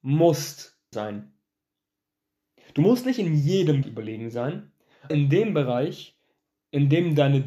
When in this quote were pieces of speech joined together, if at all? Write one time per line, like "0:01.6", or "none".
0:00.9
0:03.8
0:05.1